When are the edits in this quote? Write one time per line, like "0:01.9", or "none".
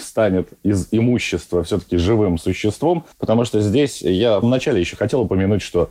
0:03.1
0:04.4